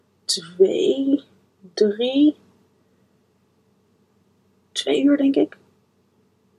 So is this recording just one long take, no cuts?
yes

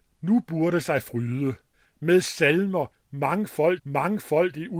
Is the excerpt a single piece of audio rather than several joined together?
no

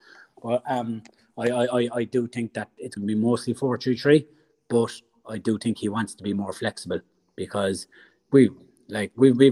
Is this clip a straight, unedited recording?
no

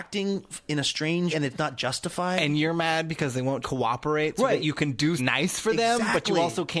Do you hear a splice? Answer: yes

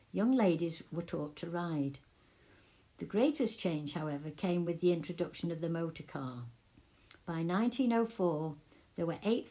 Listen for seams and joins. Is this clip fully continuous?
yes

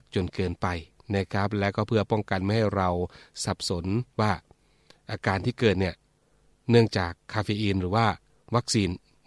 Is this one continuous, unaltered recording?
no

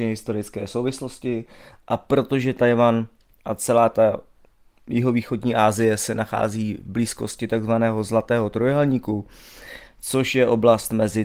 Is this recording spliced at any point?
no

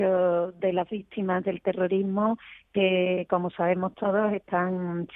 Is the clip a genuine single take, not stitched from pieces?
yes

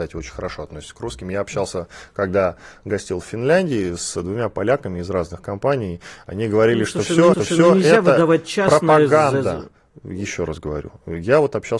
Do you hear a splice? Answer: yes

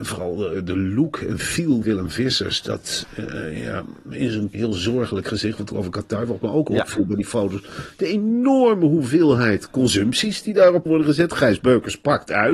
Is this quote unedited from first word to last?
no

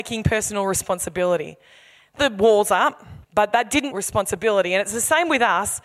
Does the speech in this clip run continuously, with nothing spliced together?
no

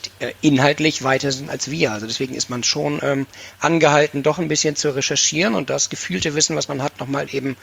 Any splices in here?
no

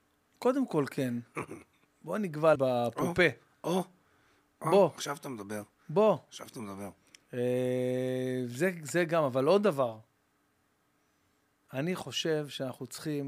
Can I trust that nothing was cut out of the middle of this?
no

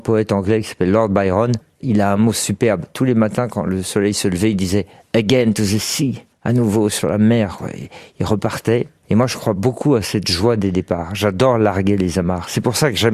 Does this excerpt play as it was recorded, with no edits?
yes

